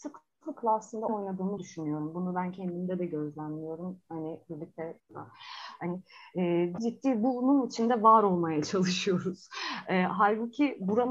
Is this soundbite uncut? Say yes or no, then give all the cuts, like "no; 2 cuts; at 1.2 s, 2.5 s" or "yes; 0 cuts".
no; 4 cuts; at 1.1 s, 1.6 s, 5.0 s, 6.8 s